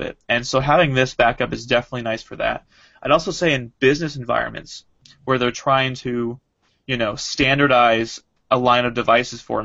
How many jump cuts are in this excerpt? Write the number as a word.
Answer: zero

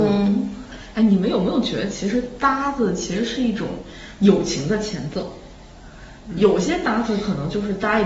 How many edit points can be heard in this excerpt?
zero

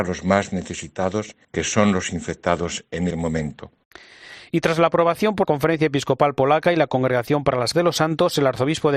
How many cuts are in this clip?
four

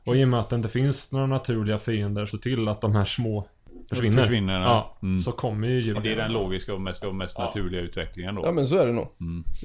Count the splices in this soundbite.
three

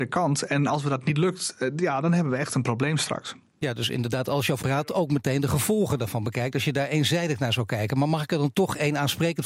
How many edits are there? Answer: one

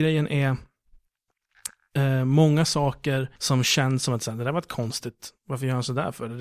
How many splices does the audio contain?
one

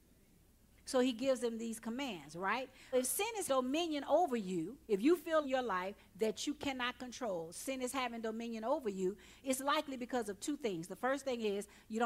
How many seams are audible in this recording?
four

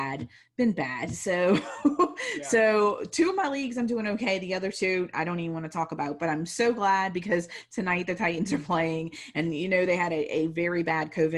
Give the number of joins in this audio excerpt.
zero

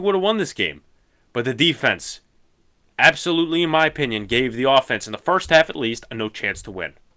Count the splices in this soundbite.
zero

